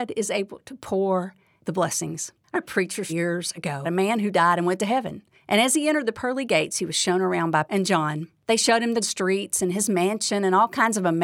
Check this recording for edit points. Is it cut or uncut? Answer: cut